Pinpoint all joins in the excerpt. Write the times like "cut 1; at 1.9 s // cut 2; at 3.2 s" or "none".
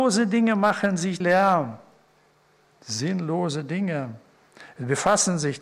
cut 1; at 1.2 s